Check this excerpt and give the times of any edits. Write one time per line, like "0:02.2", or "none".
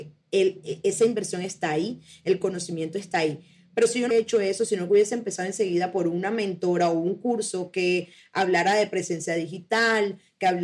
0:04.1